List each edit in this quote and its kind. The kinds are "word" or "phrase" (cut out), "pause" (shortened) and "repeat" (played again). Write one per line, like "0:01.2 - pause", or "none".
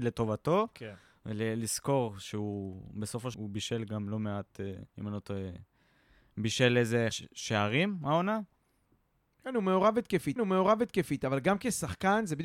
0:03.3 - word
0:04.9 - pause
0:07.1 - word
0:10.4 - repeat